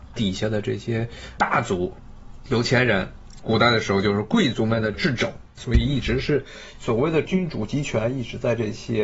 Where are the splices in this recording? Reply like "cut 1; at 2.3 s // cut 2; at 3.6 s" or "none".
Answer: cut 1; at 5.5 s